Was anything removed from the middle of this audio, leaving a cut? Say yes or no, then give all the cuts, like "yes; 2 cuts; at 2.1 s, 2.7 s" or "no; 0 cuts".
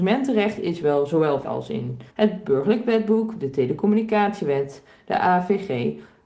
yes; 2 cuts; at 1.4 s, 2.1 s